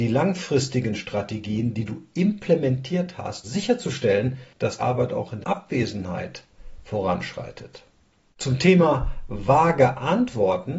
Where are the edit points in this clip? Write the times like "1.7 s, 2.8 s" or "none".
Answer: 3.4 s, 4.8 s, 5.4 s, 6.8 s